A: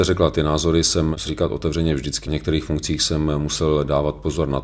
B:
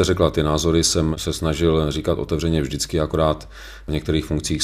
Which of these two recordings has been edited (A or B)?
A